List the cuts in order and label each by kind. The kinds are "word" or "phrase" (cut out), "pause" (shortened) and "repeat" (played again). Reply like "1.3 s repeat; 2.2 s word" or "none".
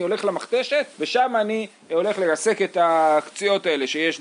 0.9 s pause